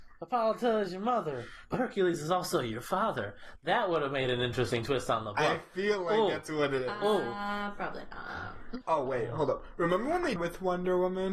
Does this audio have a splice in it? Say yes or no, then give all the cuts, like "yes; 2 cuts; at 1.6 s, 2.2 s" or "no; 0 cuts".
yes; 1 cut; at 10.4 s